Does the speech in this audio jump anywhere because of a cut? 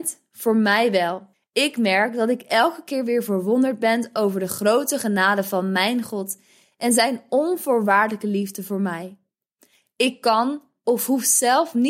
yes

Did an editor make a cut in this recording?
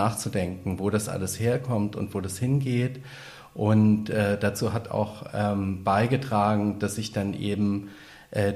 no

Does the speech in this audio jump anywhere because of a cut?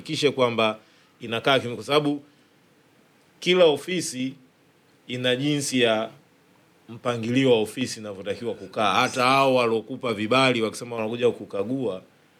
no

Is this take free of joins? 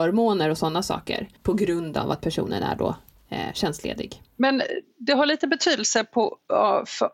no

